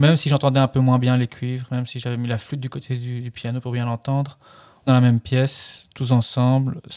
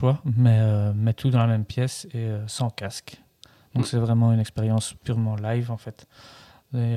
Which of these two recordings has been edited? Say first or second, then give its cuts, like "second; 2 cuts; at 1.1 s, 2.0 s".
first; 1 cut; at 4.9 s